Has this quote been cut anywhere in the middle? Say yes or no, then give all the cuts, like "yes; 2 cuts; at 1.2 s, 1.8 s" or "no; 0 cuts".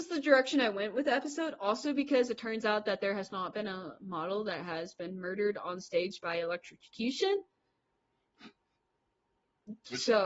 no; 0 cuts